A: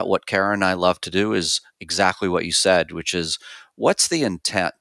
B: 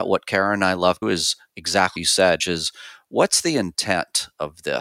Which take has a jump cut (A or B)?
B